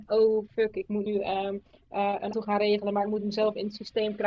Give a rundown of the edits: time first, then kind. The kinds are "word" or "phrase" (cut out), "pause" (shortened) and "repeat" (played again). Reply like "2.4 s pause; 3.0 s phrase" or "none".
1.1 s word; 2.3 s word